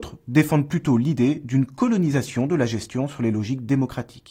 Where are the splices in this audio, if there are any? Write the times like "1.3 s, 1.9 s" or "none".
none